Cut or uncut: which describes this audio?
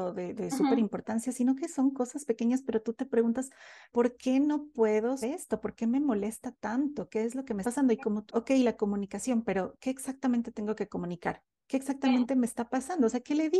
cut